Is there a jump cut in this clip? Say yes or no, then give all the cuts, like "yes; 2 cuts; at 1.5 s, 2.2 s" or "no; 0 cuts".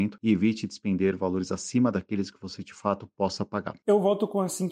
no; 0 cuts